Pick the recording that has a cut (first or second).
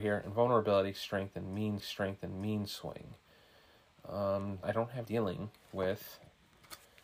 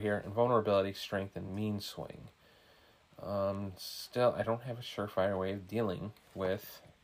first